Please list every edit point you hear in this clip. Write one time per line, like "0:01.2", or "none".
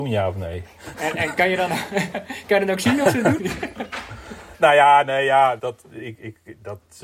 0:03.4
0:04.5
0:05.6